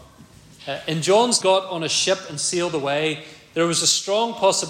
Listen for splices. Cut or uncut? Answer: cut